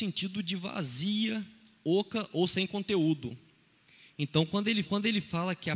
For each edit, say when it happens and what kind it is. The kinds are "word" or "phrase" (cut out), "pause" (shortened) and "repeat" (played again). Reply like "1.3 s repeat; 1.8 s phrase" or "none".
4.8 s repeat